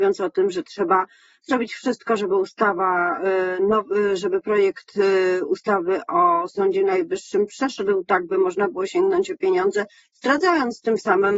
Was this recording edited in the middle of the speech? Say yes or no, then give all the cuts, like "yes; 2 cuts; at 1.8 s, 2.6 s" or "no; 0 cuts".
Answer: no; 0 cuts